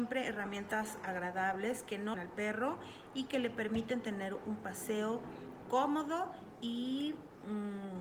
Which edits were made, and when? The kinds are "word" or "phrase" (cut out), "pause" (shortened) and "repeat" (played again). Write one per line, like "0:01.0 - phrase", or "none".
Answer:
0:02.1 - word
0:05.6 - word